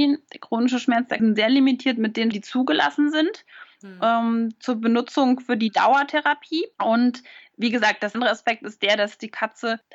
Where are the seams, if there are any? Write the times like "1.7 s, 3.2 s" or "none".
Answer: 1.2 s, 2.3 s, 8.1 s